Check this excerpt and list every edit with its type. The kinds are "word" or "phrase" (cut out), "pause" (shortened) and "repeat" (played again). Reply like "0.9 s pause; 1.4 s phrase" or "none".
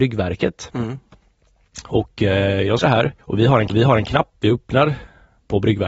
2.8 s phrase; 3.2 s pause; 3.7 s repeat